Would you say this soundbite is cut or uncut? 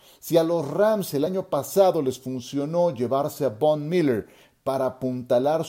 uncut